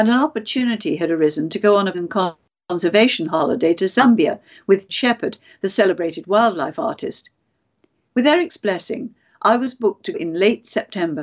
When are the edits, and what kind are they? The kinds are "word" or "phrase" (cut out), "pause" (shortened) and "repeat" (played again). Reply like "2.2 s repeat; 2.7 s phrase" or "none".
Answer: 1.9 s word; 4.9 s word; 10.1 s word